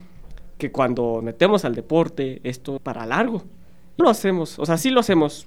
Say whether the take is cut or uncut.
cut